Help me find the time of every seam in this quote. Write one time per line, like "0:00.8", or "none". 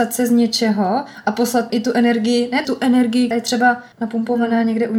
0:01.7
0:02.6
0:03.3
0:03.9